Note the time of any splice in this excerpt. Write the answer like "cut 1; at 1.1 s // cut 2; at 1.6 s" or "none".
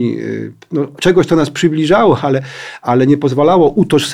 none